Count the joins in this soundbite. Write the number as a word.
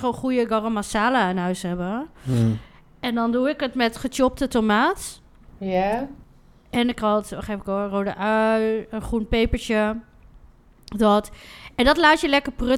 zero